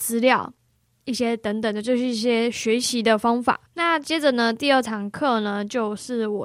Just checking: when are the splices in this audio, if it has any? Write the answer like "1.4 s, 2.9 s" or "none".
3.7 s